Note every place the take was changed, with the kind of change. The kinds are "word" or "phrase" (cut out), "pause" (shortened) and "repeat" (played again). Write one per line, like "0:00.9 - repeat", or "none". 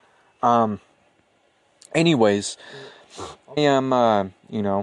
0:03.6 - word